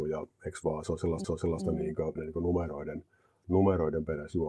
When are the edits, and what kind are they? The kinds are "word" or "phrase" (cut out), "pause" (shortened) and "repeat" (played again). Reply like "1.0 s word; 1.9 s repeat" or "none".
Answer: 1.2 s repeat; 2.2 s word